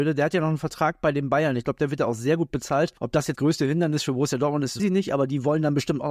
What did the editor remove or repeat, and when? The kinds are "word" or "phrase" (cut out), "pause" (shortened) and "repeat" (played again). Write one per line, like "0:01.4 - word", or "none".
0:03.0 - pause
0:03.3 - word
0:04.8 - word